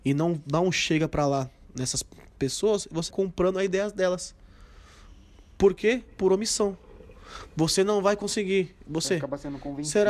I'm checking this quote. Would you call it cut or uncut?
cut